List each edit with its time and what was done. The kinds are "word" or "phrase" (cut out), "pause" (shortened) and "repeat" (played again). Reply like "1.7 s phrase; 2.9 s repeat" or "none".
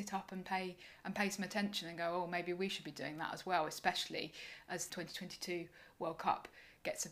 4.9 s word